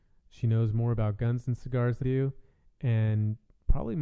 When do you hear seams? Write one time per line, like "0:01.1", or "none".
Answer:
0:02.0

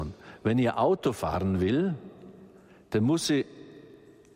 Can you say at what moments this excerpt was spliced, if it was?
none

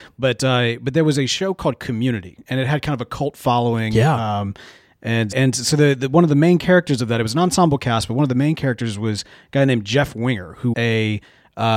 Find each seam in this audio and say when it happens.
0:05.3
0:10.7

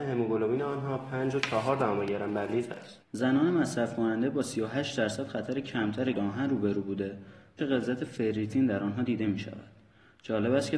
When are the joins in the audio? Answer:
0:02.7
0:03.0
0:06.1
0:07.6

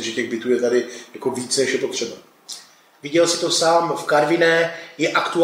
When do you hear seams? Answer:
none

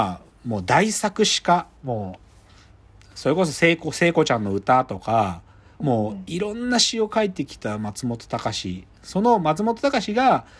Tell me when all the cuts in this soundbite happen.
0:01.8

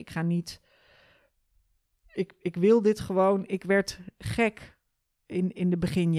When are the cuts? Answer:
none

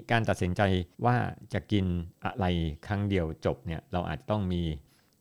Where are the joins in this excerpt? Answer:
0:00.9

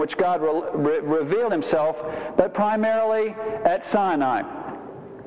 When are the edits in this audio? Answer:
none

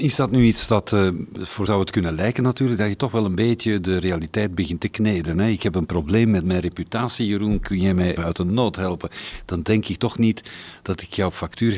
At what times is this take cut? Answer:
0:01.7
0:08.2

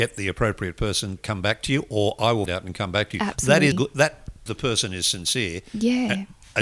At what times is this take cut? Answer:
0:01.2
0:02.5
0:03.7
0:04.5

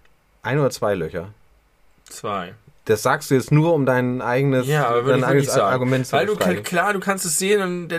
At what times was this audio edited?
none

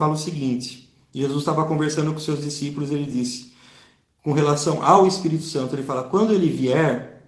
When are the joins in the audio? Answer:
none

